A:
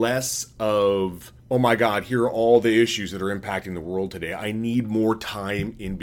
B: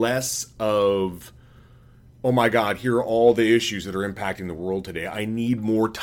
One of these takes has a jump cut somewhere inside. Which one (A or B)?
A